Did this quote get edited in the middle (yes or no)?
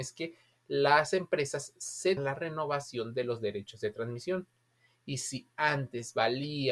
yes